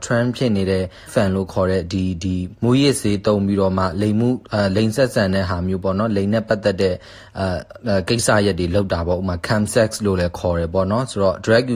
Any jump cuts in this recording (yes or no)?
yes